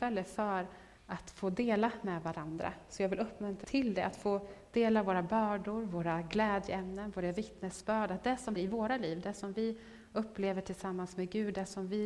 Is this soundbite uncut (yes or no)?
no